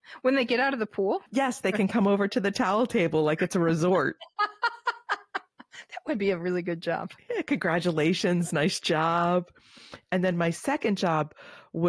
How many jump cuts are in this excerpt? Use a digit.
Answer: 2